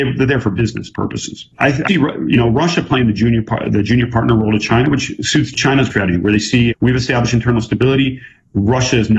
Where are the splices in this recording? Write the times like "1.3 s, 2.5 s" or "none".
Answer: 1.5 s, 1.9 s, 5.9 s, 6.7 s